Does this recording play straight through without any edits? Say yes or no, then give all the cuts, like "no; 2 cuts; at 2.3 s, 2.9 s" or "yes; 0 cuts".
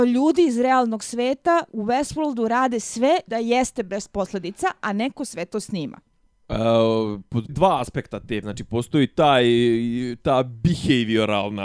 no; 4 cuts; at 1.7 s, 3.3 s, 7.5 s, 8.4 s